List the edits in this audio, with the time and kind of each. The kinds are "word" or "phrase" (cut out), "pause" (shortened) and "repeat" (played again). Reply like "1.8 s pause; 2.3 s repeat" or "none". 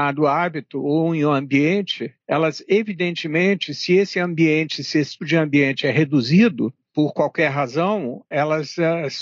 2.2 s pause; 5.2 s word; 8.3 s word